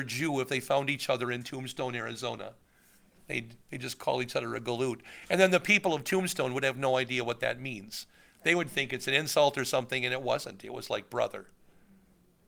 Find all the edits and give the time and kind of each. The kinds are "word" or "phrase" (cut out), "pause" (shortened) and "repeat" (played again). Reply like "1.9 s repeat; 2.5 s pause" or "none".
none